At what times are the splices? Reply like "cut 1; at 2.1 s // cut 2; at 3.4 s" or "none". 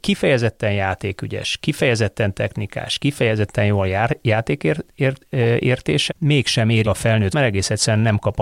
cut 1; at 6.1 s // cut 2; at 6.8 s // cut 3; at 7.3 s